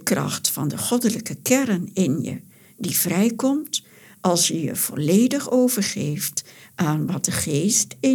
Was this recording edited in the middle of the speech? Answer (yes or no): no